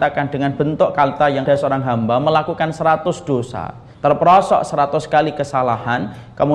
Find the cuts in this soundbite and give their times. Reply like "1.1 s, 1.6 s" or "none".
1.5 s, 3.9 s

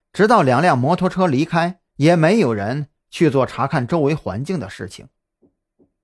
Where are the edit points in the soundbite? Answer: 1.9 s

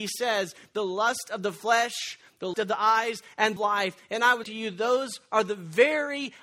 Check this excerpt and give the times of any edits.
2.5 s, 3.6 s, 4.4 s

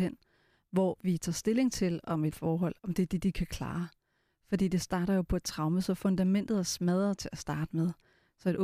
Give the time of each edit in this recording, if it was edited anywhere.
2.3 s, 2.8 s

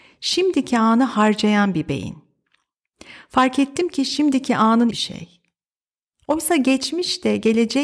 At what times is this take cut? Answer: 4.9 s

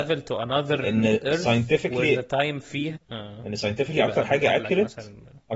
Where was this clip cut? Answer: 3.0 s

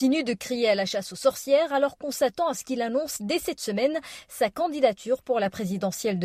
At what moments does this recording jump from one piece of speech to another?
none

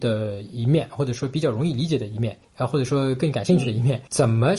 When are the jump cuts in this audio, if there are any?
2.4 s

